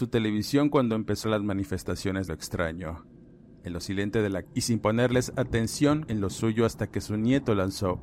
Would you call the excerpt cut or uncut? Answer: cut